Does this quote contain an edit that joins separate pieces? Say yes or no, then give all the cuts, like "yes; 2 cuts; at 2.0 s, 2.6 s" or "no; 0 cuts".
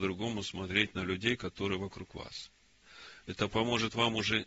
no; 0 cuts